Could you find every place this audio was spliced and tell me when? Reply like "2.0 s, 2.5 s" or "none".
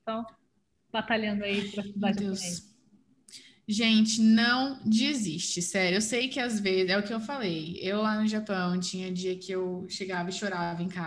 none